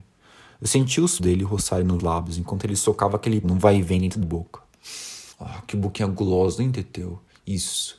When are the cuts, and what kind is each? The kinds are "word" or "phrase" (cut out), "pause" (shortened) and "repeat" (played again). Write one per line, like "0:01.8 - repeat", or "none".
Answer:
0:01.2 - word
0:02.0 - word
0:03.4 - word
0:04.2 - word
0:05.3 - pause